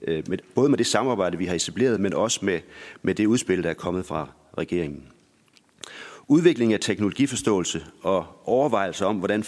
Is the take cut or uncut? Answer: uncut